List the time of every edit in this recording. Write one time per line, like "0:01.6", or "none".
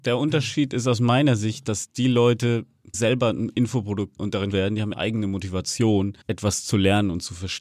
0:02.9
0:04.2
0:04.5
0:04.9
0:06.2